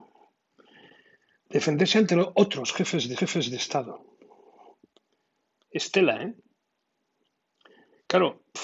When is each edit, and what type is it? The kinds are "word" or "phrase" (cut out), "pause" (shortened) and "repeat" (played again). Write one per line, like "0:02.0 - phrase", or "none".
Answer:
0:03.2 - repeat